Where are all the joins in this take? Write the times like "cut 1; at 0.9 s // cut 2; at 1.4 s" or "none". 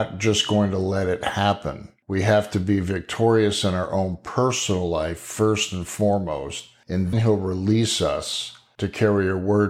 cut 1; at 7.1 s